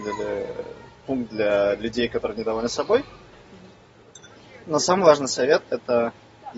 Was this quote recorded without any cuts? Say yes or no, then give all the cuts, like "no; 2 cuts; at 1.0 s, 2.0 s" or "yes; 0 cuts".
yes; 0 cuts